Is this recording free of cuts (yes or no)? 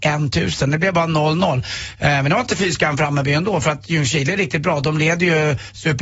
yes